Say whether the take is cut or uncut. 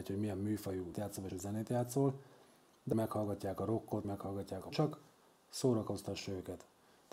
cut